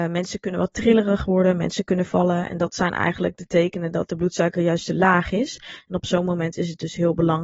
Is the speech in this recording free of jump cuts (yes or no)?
no